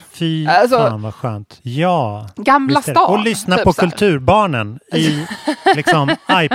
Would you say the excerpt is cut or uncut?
uncut